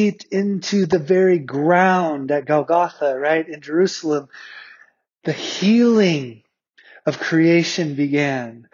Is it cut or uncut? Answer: uncut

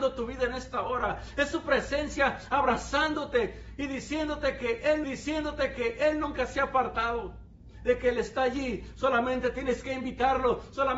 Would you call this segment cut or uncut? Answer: cut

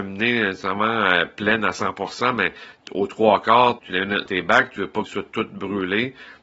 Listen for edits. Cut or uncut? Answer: cut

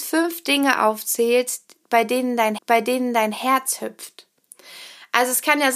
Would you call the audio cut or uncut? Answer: cut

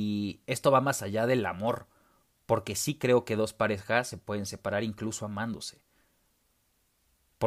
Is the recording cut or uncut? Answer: uncut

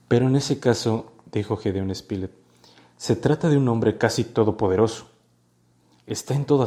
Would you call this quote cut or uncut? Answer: uncut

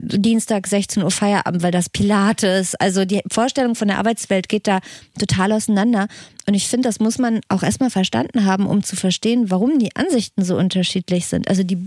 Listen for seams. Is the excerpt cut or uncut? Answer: cut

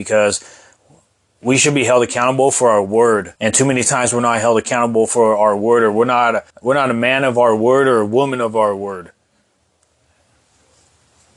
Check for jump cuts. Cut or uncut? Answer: cut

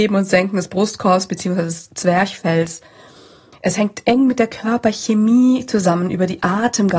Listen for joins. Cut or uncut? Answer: uncut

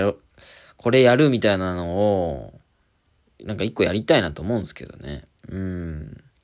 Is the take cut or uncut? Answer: uncut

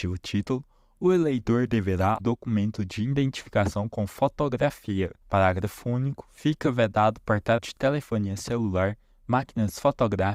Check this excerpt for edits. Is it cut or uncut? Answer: cut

